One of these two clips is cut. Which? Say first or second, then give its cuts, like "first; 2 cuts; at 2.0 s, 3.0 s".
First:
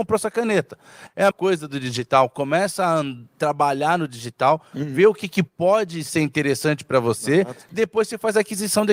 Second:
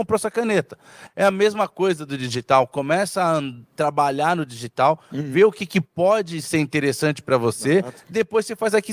first; 1 cut; at 1.3 s